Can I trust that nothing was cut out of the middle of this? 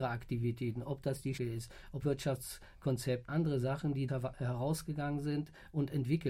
no; 4 cuts; at 1.4 s, 2.0 s, 3.3 s, 4.1 s

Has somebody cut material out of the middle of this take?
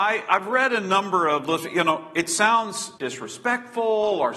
yes; 1 cut; at 3.0 s

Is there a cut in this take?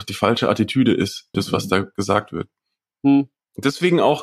yes; 1 cut; at 1.3 s

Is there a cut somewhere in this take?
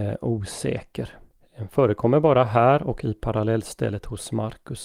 yes; 1 cut; at 1.4 s

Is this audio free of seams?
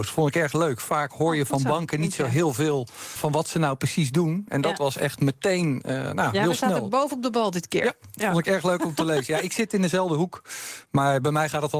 no; 1 cut; at 3.2 s

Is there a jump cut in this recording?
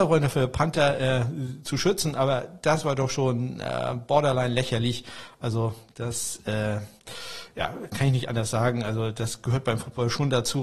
no; 0 cuts

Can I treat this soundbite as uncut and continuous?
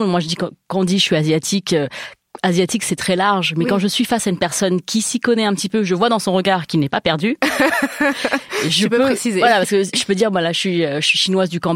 yes; 0 cuts

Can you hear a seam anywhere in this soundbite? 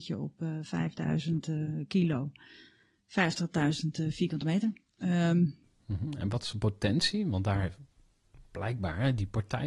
no; 0 cuts

